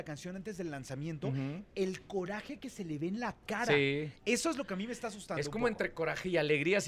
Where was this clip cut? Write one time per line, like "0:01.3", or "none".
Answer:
none